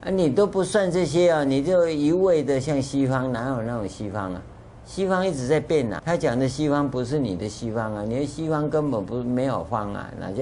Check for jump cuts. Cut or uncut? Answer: cut